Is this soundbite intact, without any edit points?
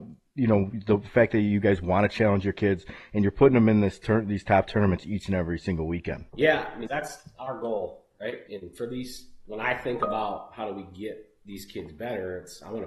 no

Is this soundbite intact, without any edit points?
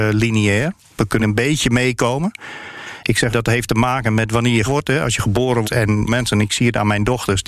no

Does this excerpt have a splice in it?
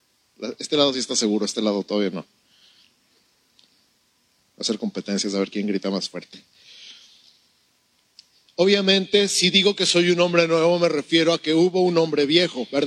no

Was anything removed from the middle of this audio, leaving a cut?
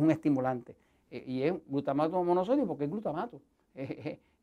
no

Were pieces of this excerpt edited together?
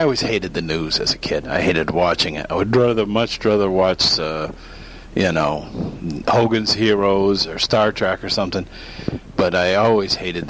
no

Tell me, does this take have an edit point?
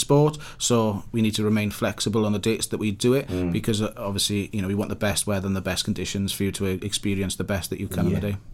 no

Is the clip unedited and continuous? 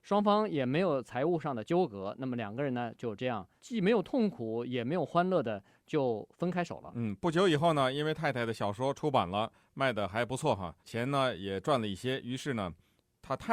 no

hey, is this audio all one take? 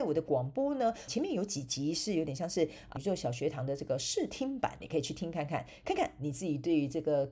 no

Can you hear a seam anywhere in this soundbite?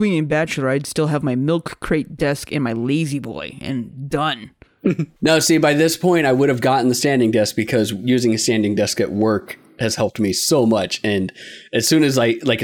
no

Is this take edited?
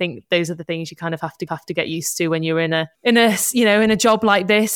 yes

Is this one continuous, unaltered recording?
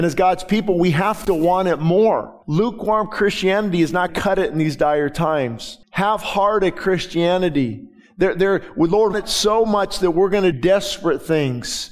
no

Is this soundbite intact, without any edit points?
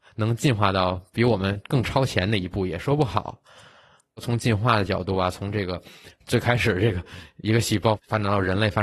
yes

